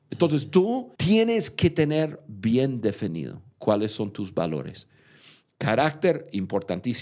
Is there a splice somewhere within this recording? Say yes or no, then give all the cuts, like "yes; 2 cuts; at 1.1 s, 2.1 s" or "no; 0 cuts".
yes; 1 cut; at 1.0 s